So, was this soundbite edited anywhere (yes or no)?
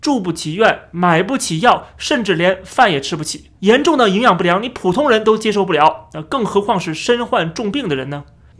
yes